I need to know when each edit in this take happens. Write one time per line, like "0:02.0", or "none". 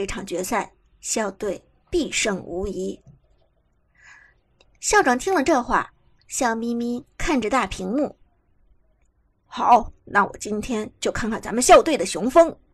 0:10.0